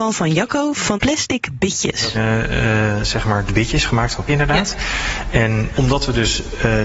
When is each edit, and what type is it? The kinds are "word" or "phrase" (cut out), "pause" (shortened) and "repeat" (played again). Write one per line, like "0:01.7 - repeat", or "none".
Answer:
0:00.9 - word
0:02.1 - word
0:03.5 - word
0:04.3 - word
0:05.7 - word